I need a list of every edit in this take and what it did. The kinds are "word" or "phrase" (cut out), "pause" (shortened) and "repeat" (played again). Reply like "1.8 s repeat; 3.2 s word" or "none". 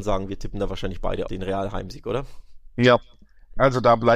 1.3 s word